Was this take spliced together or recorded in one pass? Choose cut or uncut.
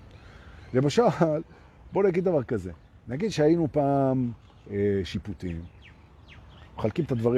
uncut